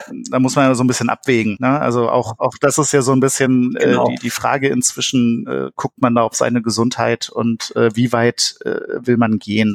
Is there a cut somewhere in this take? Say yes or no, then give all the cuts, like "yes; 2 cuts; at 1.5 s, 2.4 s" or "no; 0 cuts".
no; 0 cuts